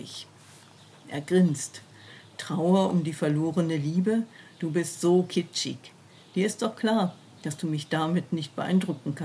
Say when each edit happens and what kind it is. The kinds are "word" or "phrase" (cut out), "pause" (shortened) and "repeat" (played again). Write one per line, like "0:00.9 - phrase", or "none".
none